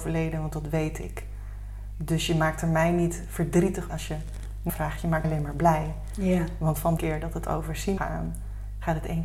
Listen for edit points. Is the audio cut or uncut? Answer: cut